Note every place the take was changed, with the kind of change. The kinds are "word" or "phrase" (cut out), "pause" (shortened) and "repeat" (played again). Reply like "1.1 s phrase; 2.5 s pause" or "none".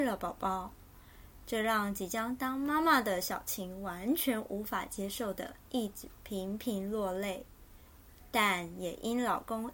5.6 s pause